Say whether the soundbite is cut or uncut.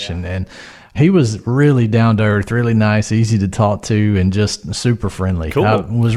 uncut